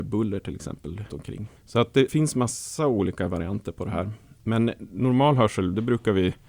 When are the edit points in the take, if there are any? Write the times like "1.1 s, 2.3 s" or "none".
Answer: 1.1 s, 1.6 s, 2.1 s